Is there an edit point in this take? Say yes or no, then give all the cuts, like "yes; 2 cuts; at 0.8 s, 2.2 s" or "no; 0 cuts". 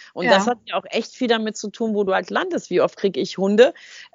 no; 0 cuts